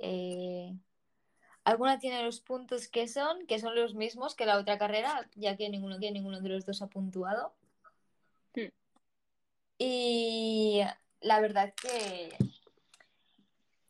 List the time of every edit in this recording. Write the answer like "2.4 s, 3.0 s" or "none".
6.0 s